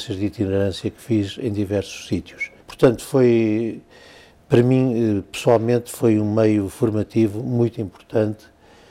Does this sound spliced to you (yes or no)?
yes